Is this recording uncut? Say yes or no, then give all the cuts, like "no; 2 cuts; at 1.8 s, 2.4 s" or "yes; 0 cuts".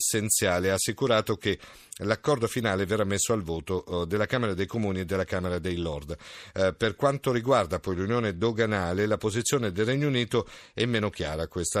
yes; 0 cuts